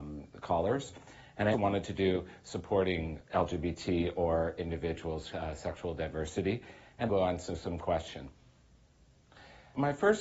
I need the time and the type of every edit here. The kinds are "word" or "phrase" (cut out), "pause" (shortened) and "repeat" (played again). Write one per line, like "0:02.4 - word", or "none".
0:01.5 - word
0:03.3 - pause
0:05.3 - phrase
0:07.1 - phrase